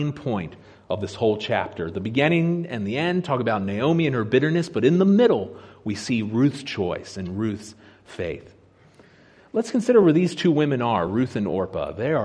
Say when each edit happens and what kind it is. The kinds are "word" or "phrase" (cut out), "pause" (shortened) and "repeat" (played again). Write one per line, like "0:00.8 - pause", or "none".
none